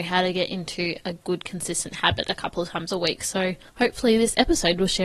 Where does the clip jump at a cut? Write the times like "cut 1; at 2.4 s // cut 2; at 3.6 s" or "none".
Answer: cut 1; at 3.7 s